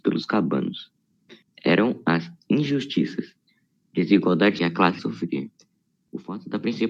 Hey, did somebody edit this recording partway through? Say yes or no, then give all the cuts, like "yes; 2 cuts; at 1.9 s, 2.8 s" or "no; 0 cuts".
yes; 3 cuts; at 1.5 s, 4.6 s, 5.0 s